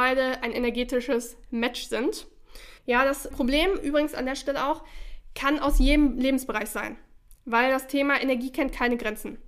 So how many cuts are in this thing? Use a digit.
2